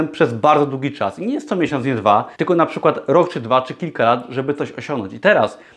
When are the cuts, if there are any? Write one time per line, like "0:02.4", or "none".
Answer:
0:02.3